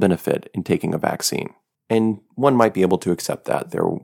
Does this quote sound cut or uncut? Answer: uncut